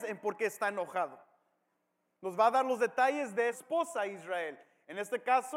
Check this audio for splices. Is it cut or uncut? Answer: cut